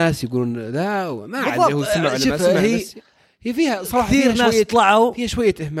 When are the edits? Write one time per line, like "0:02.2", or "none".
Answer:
none